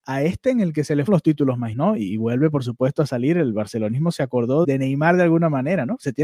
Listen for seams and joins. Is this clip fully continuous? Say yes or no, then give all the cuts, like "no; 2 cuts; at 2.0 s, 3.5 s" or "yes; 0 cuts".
no; 3 cuts; at 1.1 s, 1.7 s, 4.6 s